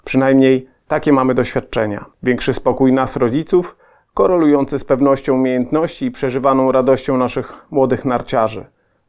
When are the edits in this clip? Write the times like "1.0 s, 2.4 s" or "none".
2.1 s